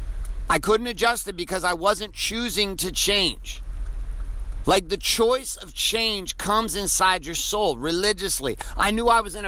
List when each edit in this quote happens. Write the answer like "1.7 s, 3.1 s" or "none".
none